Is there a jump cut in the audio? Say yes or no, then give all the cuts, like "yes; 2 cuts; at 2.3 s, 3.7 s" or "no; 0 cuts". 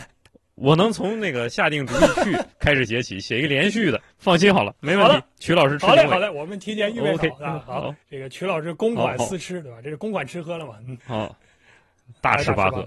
yes; 5 cuts; at 2.5 s, 4.1 s, 4.8 s, 8.0 s, 11.0 s